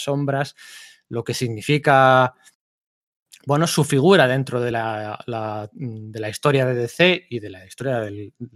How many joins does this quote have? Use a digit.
0